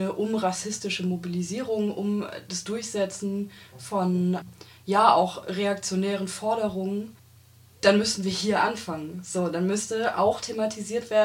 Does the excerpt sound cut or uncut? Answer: uncut